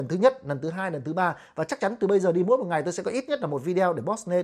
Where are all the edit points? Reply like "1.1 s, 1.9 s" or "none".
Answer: none